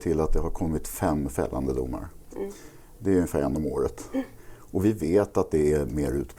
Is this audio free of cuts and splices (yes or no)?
yes